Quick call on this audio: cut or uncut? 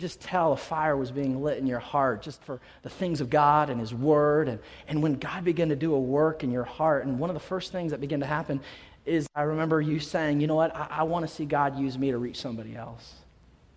uncut